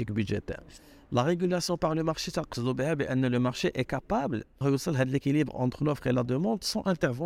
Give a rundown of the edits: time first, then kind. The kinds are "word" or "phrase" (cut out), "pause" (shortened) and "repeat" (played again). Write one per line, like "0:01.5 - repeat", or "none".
0:04.6 - word